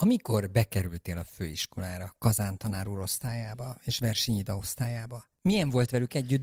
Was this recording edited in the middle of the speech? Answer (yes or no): no